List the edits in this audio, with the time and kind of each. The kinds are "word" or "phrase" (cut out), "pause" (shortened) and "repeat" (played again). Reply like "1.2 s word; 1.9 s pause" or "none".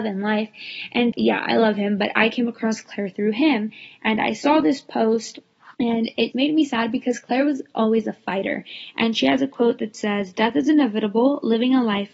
1.1 s word; 5.7 s pause; 6.3 s word